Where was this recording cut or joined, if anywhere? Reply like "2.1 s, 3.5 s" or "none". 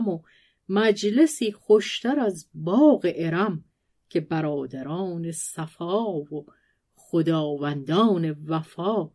none